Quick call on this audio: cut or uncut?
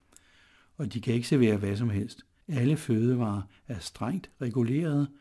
cut